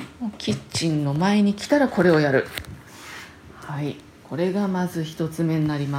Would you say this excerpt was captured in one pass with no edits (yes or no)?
yes